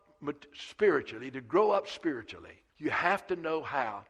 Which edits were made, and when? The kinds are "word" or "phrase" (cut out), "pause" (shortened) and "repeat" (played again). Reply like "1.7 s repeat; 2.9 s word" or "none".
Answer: 2.7 s pause